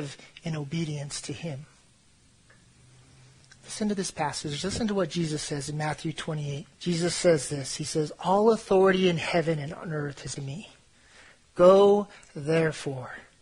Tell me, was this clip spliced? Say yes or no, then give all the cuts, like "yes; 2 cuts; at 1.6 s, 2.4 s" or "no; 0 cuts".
yes; 2 cuts; at 6.7 s, 10.4 s